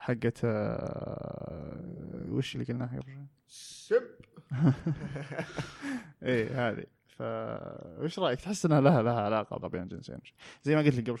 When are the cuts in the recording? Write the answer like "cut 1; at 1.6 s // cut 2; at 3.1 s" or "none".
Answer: cut 1; at 2.5 s // cut 2; at 8.6 s // cut 3; at 9.6 s